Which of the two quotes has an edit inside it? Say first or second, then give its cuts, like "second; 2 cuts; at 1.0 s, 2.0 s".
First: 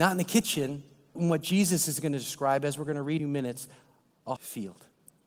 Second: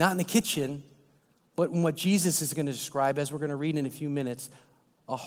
first; 3 cuts; at 1.2 s, 3.2 s, 4.4 s